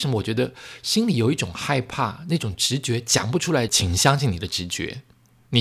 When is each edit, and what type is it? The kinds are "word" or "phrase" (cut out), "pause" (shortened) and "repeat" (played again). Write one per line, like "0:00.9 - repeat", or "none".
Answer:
0:03.7 - phrase